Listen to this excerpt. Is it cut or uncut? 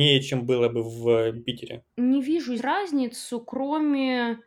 cut